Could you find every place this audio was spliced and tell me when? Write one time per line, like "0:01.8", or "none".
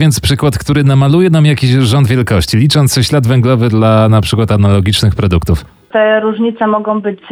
none